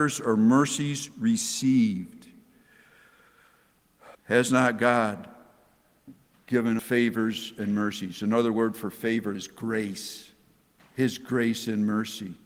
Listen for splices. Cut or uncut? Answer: cut